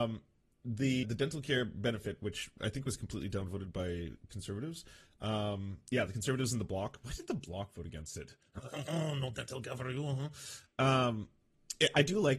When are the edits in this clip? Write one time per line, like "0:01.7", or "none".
0:01.0